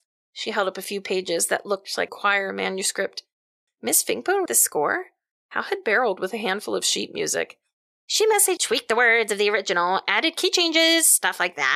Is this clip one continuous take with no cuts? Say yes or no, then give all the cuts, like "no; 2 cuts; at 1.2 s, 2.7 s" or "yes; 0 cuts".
no; 4 cuts; at 2.1 s, 4.5 s, 6.2 s, 8.6 s